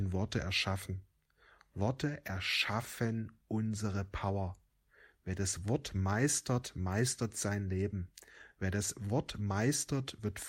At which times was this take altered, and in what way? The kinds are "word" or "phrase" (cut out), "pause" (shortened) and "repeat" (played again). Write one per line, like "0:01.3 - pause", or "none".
none